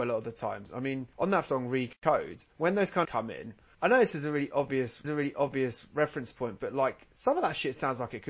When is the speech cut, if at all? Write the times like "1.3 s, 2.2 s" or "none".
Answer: 1.1 s, 1.5 s, 2.5 s, 3.0 s, 3.7 s, 5.0 s